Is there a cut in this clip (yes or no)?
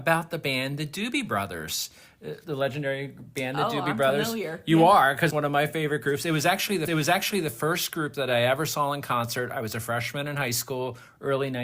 yes